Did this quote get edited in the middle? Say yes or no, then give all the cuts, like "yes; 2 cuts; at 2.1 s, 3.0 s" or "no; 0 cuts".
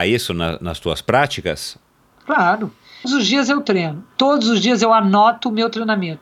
yes; 1 cut; at 3.0 s